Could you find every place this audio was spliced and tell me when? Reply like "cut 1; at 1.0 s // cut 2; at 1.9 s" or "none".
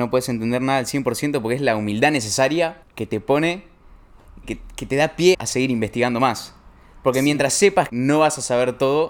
cut 1; at 2.8 s // cut 2; at 4.4 s // cut 3; at 5.3 s // cut 4; at 7.9 s